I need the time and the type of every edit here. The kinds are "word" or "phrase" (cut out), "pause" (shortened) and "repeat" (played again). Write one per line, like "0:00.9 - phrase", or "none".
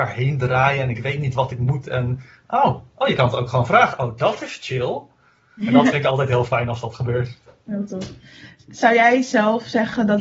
none